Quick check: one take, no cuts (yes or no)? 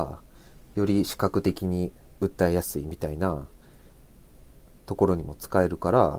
yes